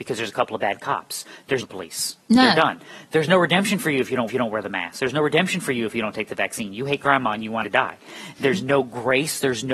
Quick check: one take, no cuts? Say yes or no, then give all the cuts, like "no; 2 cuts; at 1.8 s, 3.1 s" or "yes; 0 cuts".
no; 3 cuts; at 1.6 s, 4.3 s, 7.6 s